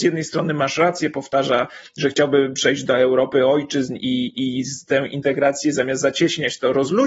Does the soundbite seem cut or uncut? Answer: uncut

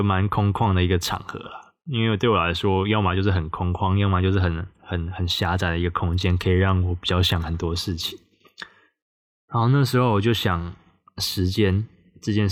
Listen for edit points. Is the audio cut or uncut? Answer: uncut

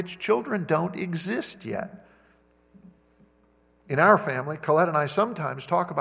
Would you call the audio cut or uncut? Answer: uncut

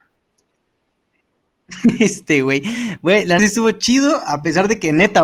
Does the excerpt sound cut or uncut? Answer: cut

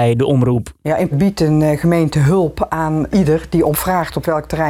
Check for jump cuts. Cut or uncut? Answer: cut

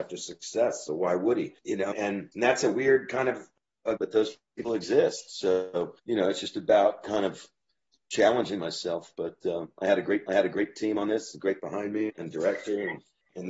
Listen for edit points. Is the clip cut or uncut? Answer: cut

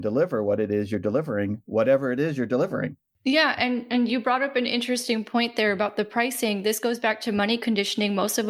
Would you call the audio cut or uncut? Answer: cut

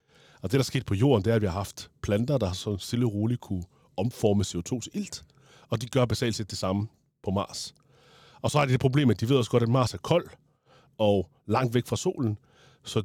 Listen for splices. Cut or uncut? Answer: uncut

